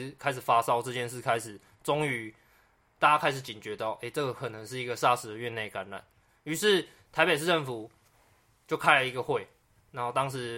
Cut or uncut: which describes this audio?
uncut